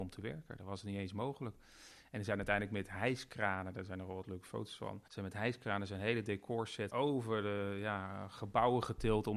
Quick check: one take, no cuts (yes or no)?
no